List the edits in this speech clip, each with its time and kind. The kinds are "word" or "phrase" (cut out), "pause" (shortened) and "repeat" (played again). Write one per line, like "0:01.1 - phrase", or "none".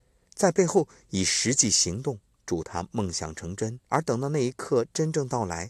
0:03.8 - pause

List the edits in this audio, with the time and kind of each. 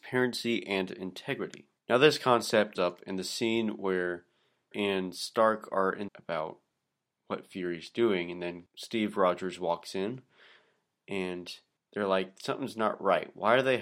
0:01.8 - pause
0:02.8 - word
0:04.7 - word
0:06.1 - phrase

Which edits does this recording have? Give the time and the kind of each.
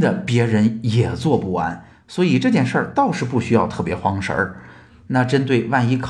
none

